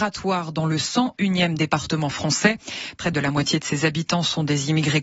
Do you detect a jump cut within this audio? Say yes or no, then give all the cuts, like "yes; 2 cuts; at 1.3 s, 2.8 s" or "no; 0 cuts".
no; 0 cuts